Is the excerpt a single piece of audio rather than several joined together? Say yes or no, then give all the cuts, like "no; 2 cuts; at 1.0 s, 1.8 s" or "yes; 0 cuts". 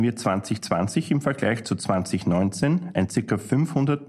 yes; 0 cuts